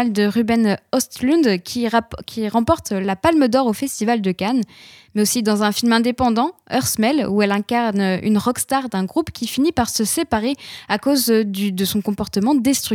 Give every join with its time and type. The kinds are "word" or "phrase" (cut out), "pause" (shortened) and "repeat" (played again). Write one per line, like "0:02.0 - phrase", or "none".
none

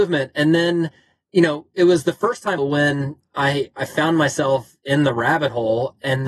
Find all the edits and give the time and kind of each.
0:02.6 - word

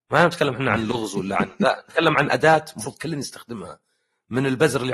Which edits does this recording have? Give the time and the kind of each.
none

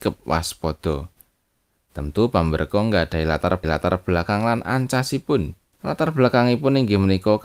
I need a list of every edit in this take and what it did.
0:02.7 - word
0:03.6 - repeat
0:05.7 - pause

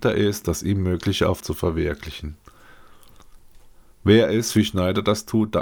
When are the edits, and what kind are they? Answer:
0:01.4 - phrase

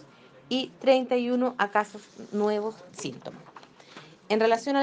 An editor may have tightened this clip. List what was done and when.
0:02.9 - word

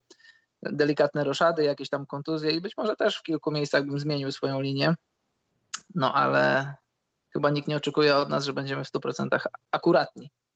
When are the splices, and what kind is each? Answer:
none

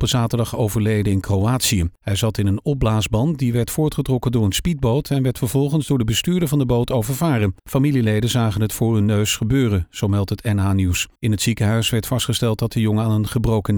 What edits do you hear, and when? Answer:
0:02.0 - pause
0:07.6 - pause
0:11.2 - pause

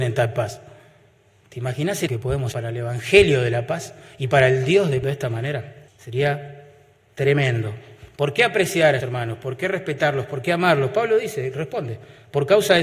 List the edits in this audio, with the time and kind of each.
0:02.1 - word
0:02.5 - word
0:05.0 - phrase
0:05.9 - pause
0:09.0 - word

